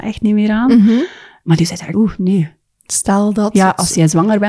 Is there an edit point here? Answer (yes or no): yes